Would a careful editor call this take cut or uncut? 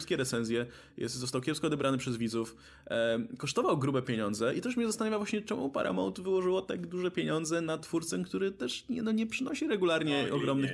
uncut